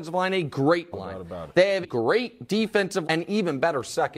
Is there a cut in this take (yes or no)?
yes